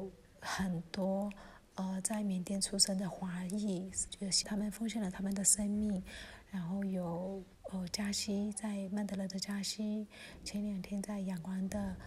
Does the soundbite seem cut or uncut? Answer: cut